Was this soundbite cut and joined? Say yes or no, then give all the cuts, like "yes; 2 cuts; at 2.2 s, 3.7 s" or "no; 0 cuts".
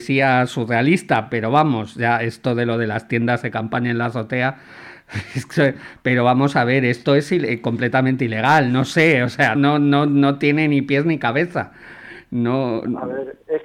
yes; 1 cut; at 9.5 s